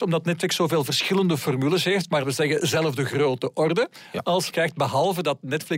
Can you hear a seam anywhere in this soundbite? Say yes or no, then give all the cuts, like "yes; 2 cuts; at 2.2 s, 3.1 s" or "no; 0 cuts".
yes; 2 cuts; at 2.2 s, 4.5 s